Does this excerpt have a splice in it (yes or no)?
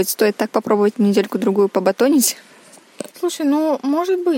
yes